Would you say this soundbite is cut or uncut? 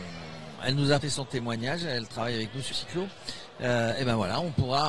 cut